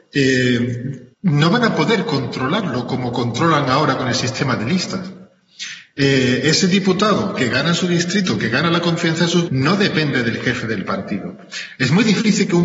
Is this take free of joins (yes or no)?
no